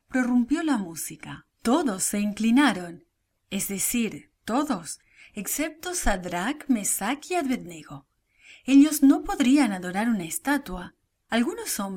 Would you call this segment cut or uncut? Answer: cut